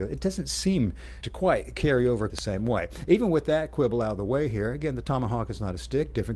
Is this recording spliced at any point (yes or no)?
yes